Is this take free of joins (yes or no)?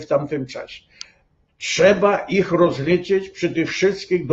yes